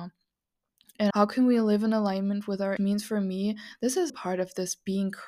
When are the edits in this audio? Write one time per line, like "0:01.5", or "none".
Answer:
0:01.1
0:02.8
0:04.1